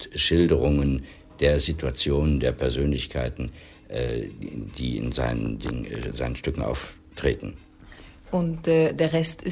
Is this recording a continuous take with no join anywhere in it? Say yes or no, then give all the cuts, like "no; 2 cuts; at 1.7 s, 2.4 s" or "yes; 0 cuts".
yes; 0 cuts